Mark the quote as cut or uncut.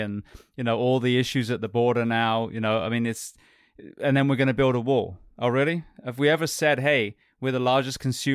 uncut